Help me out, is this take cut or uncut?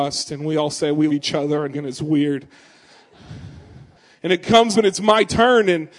cut